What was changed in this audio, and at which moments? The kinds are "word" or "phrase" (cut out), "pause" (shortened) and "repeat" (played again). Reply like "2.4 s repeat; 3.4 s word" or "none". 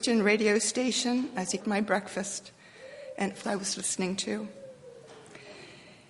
1.6 s word; 3.4 s word